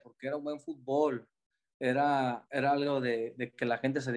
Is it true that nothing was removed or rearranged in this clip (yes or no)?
yes